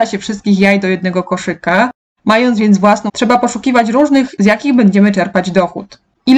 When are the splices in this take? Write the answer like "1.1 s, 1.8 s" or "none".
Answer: 3.1 s, 4.4 s